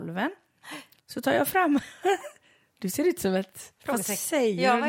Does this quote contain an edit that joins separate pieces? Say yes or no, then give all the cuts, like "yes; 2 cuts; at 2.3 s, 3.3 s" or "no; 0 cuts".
yes; 1 cut; at 1.0 s